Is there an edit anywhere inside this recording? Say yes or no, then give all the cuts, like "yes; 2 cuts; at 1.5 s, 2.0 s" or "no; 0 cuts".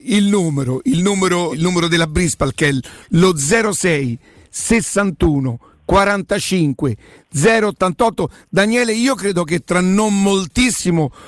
yes; 1 cut; at 1.5 s